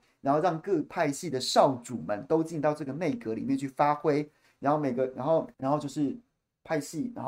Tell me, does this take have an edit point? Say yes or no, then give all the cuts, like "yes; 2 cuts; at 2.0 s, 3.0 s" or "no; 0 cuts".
yes; 1 cut; at 5.5 s